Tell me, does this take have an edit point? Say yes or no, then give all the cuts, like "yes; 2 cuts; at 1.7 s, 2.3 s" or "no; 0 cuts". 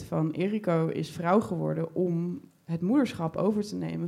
no; 0 cuts